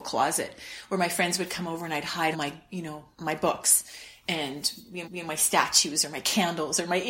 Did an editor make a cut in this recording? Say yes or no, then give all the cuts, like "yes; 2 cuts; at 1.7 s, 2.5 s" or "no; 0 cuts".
yes; 3 cuts; at 2.3 s, 3.1 s, 5.0 s